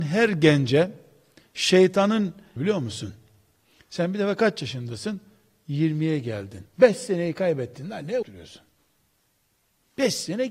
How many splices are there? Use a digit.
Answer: 3